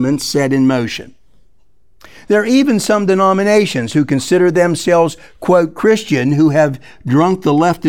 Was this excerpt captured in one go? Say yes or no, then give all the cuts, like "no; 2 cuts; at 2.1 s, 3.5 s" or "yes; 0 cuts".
yes; 0 cuts